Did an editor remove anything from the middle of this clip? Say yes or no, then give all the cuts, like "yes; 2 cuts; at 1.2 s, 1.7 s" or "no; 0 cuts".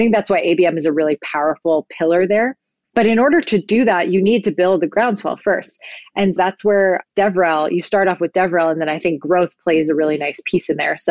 yes; 2 cuts; at 2.8 s, 6.4 s